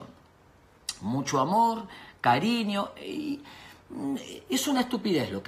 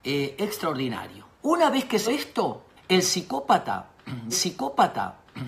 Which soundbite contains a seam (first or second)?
second